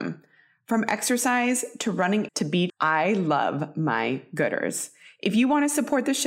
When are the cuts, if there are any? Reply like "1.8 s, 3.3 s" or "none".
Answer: 2.3 s, 2.7 s